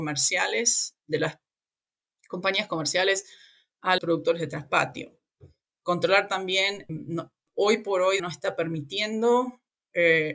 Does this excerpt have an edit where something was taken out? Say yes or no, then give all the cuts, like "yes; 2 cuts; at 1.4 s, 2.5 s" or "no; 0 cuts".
yes; 4 cuts; at 1.0 s, 4.0 s, 6.9 s, 8.2 s